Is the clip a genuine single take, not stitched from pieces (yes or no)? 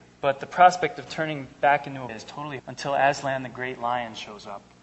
no